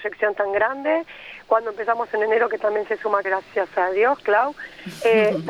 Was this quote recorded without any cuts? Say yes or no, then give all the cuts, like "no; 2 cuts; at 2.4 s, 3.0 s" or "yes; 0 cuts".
no; 1 cut; at 3.2 s